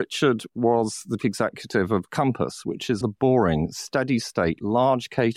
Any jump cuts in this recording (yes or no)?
yes